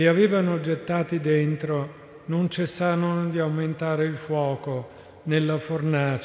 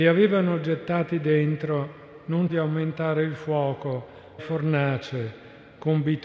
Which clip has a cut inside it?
second; 2 cuts; at 2.5 s, 4.4 s

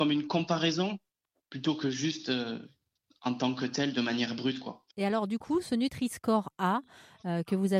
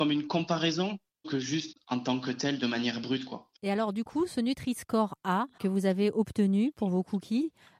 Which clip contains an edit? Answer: second; 3 cuts; at 1.2 s, 1.7 s, 5.6 s

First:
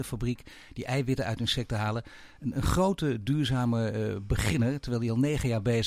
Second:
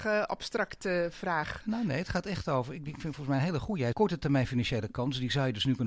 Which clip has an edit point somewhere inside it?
second; 1 cut; at 3.9 s

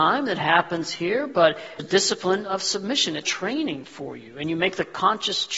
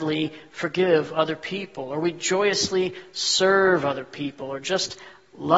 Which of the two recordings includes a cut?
first; 2 cuts; at 1.8 s, 3.2 s

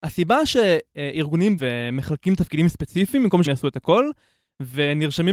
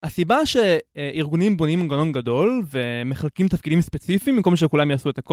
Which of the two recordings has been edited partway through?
first; 2 cuts; at 1.6 s, 3.5 s

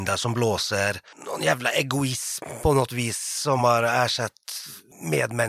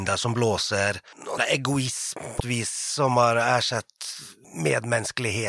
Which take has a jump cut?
second; 2 cuts; at 1.4 s, 2.4 s

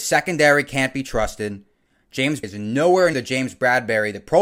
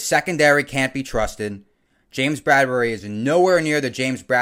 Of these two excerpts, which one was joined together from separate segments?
first; 2 cuts; at 2.4 s, 3.1 s

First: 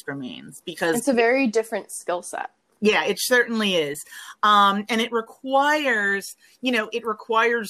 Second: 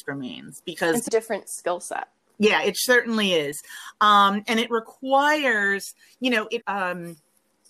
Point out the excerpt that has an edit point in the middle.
second; 2 cuts; at 1.1 s, 6.6 s

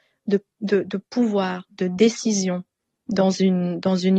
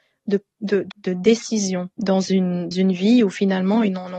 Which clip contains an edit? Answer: second; 3 cuts; at 0.9 s, 1.9 s, 2.7 s

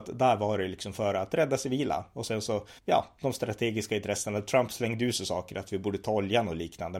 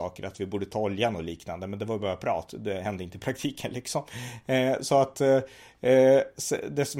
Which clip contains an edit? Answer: first; 1 cut; at 2.8 s

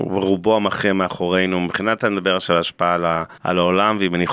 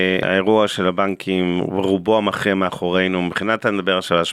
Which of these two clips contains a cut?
first; 1 cut; at 3.4 s

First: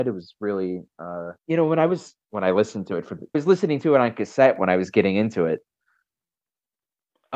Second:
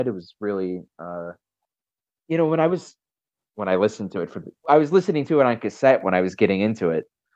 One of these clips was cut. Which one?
first; 3 cuts; at 1.4 s, 2.2 s, 3.3 s

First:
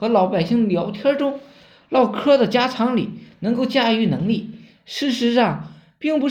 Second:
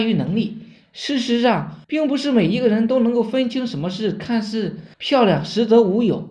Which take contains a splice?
second; 2 cuts; at 1.8 s, 4.9 s

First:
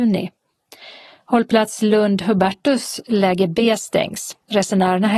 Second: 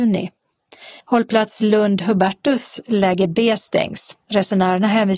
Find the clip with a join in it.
second; 1 cut; at 1.0 s

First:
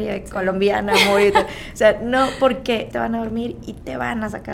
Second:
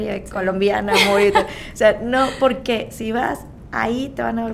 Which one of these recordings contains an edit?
first; 1 cut; at 2.9 s

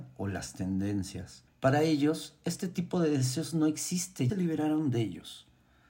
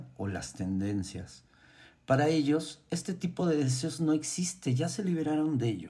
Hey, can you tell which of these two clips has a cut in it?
first; 2 cuts; at 1.5 s, 4.3 s

